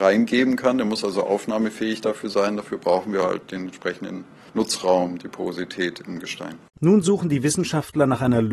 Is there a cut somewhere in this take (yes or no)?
no